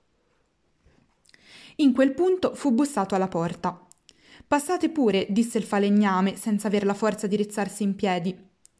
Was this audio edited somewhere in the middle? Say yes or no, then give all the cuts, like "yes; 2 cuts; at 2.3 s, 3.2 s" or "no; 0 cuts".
no; 0 cuts